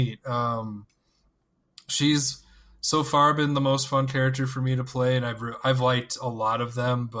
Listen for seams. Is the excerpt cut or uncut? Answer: uncut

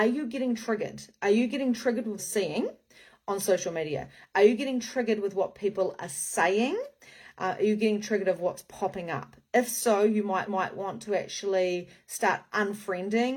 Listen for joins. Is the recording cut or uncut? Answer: cut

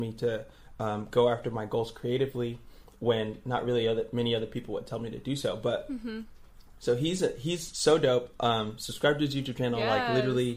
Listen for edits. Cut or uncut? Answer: uncut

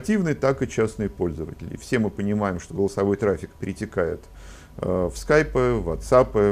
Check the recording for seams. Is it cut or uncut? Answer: uncut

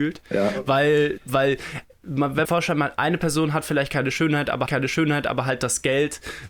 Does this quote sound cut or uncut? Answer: cut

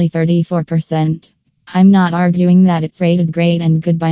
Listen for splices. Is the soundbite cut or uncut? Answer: uncut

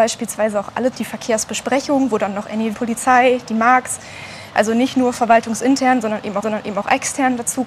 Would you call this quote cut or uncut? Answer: cut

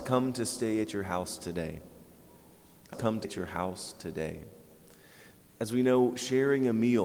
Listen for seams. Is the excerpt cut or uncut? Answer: cut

